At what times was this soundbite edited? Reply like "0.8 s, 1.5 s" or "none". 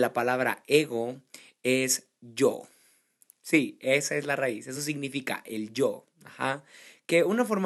none